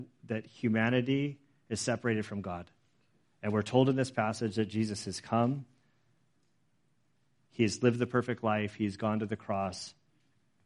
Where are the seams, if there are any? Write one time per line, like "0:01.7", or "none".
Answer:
none